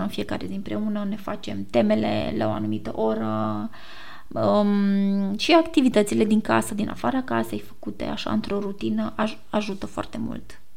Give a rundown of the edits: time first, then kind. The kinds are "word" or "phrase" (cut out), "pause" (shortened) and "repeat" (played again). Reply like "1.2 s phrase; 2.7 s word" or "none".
none